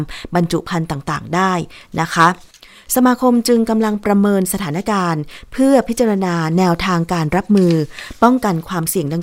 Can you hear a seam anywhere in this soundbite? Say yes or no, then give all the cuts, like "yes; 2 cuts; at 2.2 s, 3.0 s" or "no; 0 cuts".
no; 0 cuts